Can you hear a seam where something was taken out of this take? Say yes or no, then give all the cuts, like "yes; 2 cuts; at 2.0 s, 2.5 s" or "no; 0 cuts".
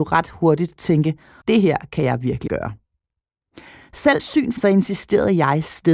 yes; 4 cuts; at 1.4 s, 2.5 s, 4.2 s, 4.6 s